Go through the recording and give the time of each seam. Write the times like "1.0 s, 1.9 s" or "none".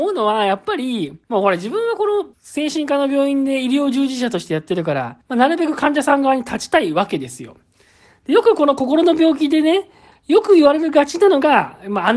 1.2 s, 2.3 s, 5.2 s

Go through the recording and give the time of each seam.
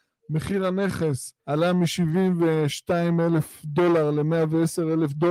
1.4 s

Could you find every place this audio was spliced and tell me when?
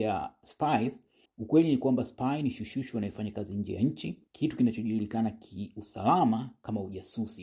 1.3 s, 4.3 s

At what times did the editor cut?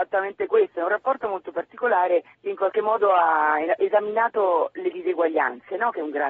2.3 s

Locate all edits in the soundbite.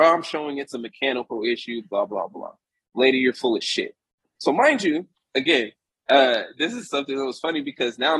none

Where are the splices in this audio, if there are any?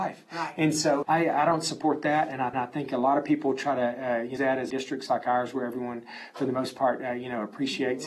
1.0 s, 2.5 s, 4.4 s, 4.7 s

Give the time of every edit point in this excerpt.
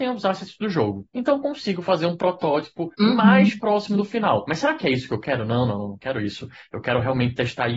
1.1 s, 2.9 s

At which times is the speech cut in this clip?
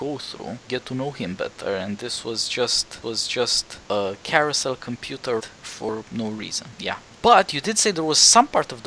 3.0 s, 5.4 s

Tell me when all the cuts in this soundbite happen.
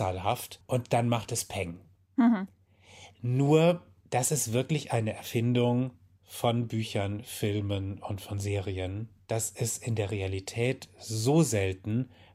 none

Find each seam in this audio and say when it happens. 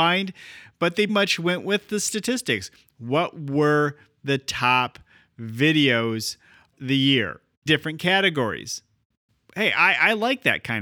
1.1 s, 6.7 s, 7.7 s

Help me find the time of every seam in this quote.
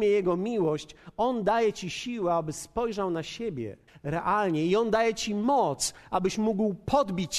3.9 s

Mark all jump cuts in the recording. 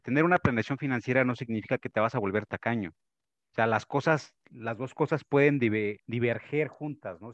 6.0 s

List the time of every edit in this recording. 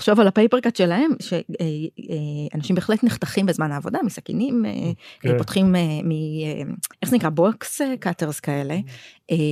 6.9 s

